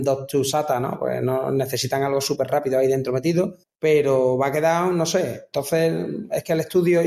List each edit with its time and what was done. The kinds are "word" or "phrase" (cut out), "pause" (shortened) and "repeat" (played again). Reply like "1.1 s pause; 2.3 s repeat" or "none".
3.6 s pause